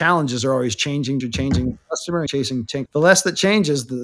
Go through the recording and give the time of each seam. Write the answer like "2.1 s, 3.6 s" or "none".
1.2 s, 2.3 s, 2.9 s